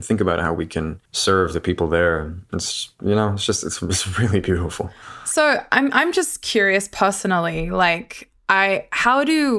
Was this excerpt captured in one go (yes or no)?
no